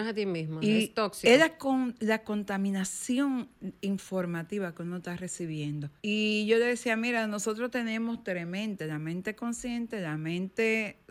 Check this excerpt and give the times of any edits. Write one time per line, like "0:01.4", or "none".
0:06.0